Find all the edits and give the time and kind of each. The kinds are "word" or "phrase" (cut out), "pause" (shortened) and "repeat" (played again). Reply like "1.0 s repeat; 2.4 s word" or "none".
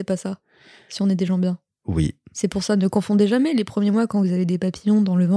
none